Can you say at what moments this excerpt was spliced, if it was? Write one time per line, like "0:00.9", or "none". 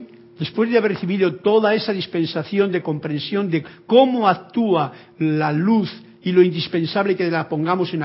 none

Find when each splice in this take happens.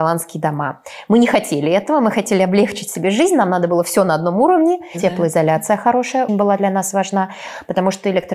0:06.3

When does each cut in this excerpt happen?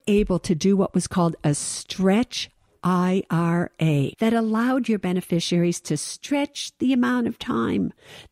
0:04.1

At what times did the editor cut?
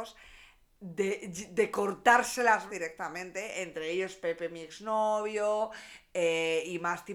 0:02.7

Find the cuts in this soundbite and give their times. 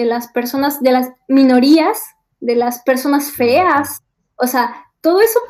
none

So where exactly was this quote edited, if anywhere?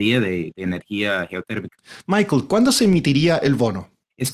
none

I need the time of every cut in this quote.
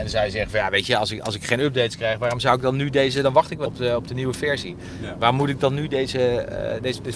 0:03.7

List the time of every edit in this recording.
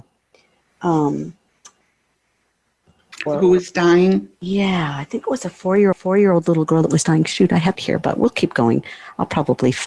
0:03.3
0:05.9
0:07.7

